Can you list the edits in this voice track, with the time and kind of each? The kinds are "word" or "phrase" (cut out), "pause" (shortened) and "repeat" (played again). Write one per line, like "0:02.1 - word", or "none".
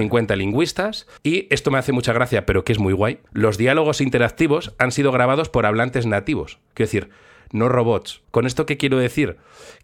0:01.2 - pause
0:03.3 - pause
0:08.2 - pause